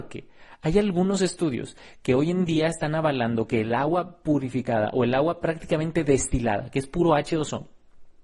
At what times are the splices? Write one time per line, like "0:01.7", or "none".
none

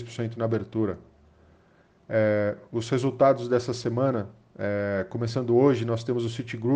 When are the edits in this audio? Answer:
none

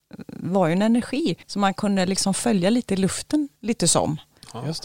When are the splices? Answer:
0:01.4
0:03.6

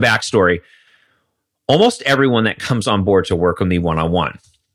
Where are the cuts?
none

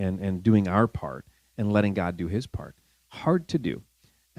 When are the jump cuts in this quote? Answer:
none

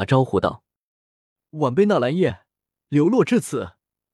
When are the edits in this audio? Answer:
none

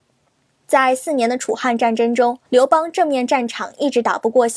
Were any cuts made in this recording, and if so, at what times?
0:02.4

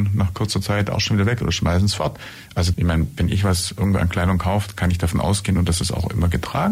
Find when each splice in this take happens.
0:02.7

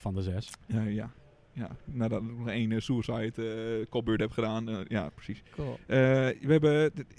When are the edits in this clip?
none

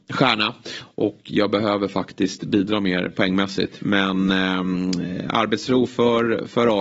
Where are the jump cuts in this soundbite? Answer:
none

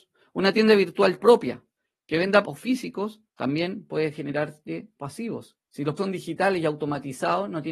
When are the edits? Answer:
0:01.2
0:01.8
0:02.4
0:03.3
0:05.0
0:05.7
0:06.0

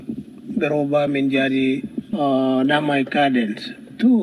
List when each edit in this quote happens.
none

